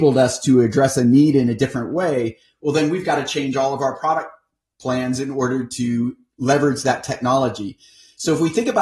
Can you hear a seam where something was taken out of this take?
no; 0 cuts

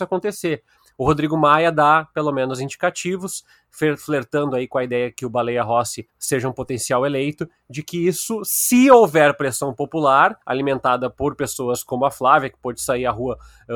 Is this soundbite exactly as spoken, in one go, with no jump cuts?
no; 2 cuts; at 6.1 s, 10.4 s

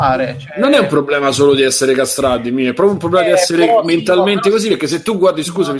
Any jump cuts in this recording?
no; 0 cuts

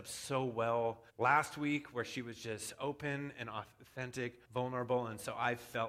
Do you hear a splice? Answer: yes; 2 cuts; at 1.1 s, 4.4 s

